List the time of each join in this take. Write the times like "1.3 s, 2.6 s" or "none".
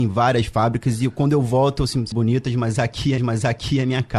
2.1 s, 3.2 s